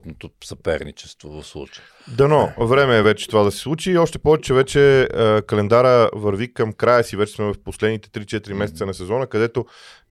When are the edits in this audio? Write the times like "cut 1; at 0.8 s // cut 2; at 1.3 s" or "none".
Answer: none